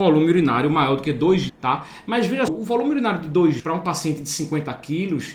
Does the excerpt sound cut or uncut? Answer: cut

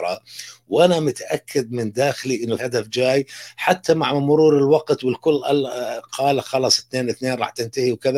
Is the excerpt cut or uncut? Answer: cut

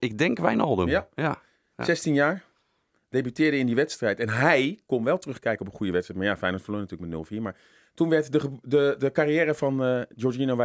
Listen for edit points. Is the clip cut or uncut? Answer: uncut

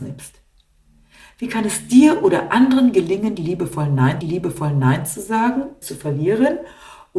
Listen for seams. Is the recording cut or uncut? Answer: cut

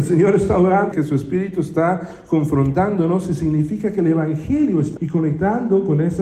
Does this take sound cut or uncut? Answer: cut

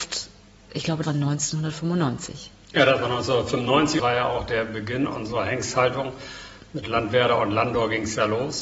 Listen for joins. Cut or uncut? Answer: cut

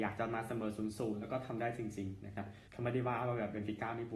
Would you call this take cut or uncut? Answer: cut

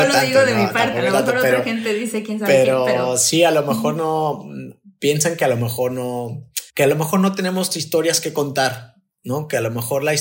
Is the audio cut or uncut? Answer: cut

